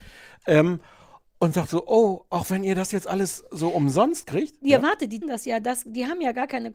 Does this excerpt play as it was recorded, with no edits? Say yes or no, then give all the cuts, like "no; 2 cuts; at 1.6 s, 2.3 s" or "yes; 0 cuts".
no; 1 cut; at 5.2 s